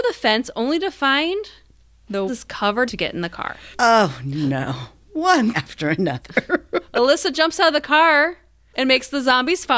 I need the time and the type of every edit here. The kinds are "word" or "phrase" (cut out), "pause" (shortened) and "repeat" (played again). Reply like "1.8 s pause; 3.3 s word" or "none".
2.3 s word; 2.9 s phrase; 3.7 s pause; 5.5 s word